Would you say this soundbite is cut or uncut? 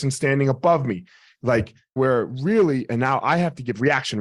cut